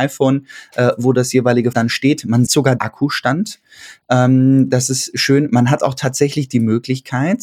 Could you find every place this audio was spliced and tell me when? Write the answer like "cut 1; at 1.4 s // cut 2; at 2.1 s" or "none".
cut 1; at 1.7 s // cut 2; at 2.5 s // cut 3; at 2.8 s